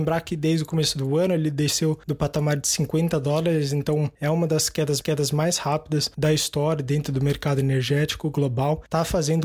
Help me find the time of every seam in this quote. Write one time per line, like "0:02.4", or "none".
0:05.0